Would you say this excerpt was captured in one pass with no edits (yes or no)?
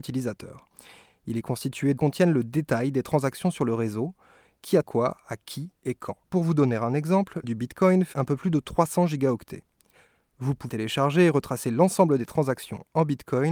no